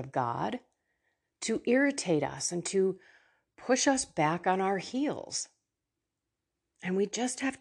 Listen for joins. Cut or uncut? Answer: uncut